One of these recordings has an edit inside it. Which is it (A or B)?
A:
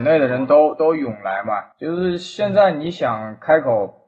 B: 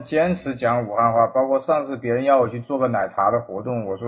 A